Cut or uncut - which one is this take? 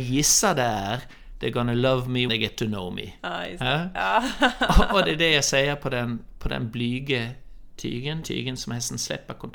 cut